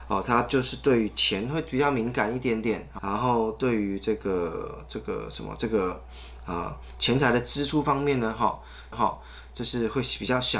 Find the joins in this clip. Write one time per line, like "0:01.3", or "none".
0:03.0
0:08.9